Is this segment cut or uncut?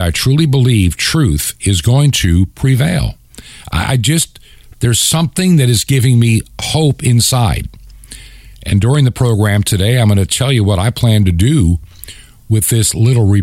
uncut